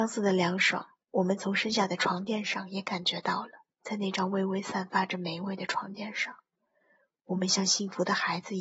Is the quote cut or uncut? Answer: cut